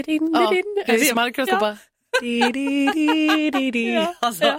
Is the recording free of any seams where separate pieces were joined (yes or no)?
no